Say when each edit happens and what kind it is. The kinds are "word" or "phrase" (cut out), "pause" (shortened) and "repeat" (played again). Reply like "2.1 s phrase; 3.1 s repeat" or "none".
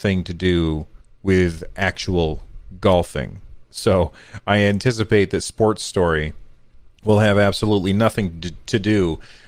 1.0 s pause; 6.9 s pause